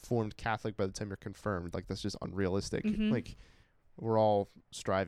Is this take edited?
no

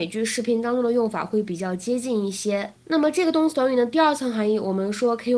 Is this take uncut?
no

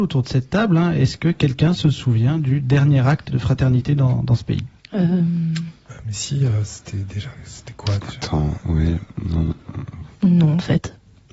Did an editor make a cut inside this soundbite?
yes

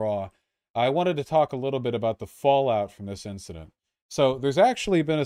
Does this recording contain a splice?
no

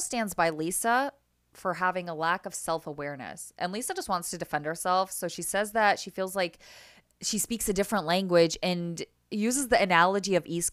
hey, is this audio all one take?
yes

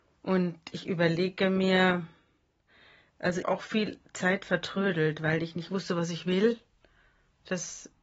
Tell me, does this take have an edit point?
yes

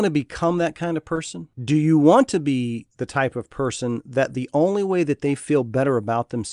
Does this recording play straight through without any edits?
no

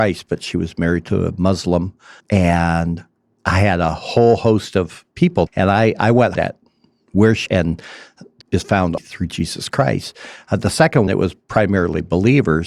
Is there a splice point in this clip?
yes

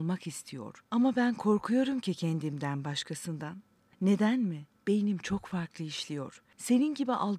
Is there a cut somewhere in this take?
no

